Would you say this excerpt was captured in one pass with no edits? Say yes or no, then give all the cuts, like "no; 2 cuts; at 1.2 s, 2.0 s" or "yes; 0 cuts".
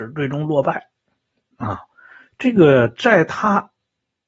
yes; 0 cuts